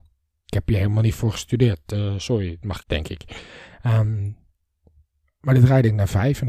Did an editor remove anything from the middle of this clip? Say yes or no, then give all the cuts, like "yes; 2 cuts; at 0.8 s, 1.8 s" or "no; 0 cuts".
yes; 1 cut; at 2.8 s